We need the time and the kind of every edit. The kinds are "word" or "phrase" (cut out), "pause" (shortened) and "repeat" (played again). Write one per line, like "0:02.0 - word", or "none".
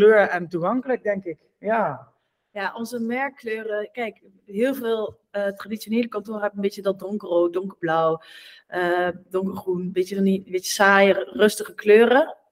none